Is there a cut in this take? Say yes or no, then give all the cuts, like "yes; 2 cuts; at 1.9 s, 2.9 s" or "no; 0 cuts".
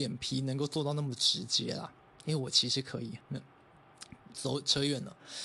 yes; 1 cut; at 3.2 s